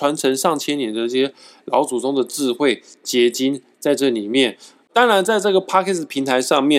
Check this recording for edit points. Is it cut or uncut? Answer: uncut